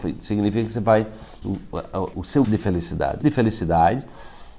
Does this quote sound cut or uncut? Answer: cut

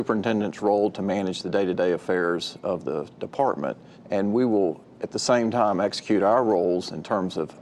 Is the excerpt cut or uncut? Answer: cut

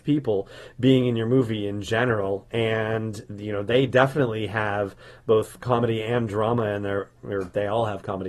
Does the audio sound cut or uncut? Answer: uncut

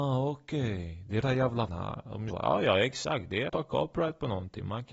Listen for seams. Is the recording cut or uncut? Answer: cut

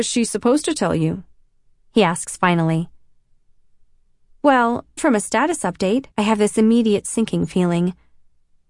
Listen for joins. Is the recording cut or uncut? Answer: cut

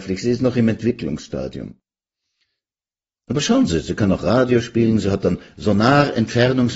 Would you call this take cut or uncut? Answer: uncut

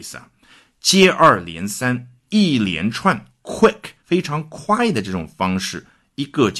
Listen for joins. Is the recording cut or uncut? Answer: cut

